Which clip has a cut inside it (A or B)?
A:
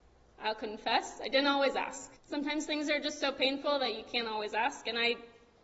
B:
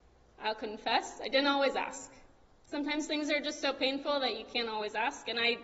A